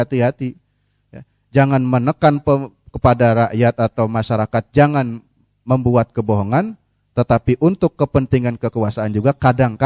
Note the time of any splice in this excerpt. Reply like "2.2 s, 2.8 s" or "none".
none

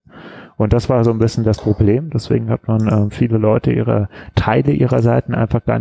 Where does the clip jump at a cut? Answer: none

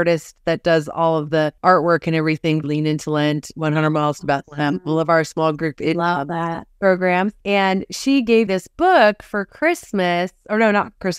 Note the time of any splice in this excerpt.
1.6 s, 2.6 s, 7.4 s, 8.5 s

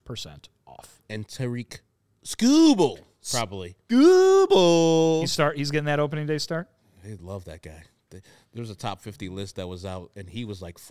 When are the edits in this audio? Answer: none

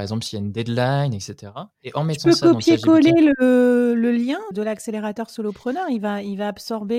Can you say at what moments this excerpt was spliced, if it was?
1.7 s, 4.5 s

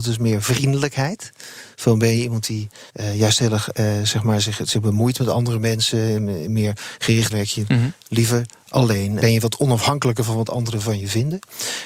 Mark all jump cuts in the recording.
2.9 s, 7.3 s, 9.2 s

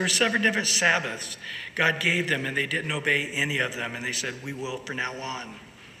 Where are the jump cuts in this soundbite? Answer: none

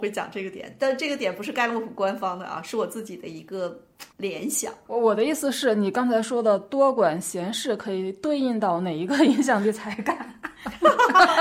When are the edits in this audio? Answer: 4.1 s, 4.9 s

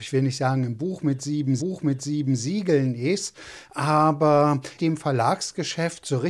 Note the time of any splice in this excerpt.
1.6 s, 4.8 s

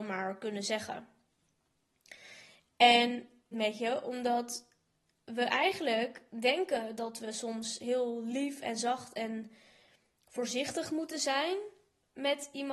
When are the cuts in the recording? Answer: 3.5 s

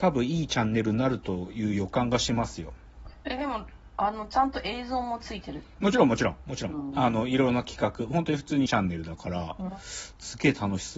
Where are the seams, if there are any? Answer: 8.7 s

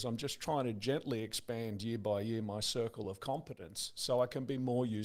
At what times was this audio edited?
none

